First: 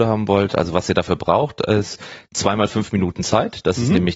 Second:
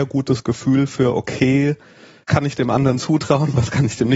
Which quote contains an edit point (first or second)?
second